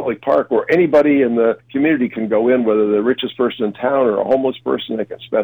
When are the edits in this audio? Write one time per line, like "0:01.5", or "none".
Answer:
0:01.6